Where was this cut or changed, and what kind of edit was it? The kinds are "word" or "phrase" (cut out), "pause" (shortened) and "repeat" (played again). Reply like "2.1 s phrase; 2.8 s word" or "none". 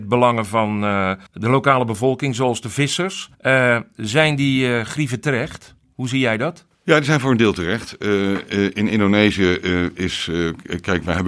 1.3 s pause; 3.3 s pause; 6.7 s pause